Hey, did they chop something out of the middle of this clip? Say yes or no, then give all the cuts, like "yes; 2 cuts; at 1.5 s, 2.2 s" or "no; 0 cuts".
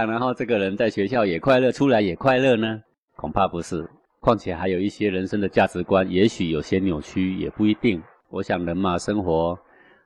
no; 0 cuts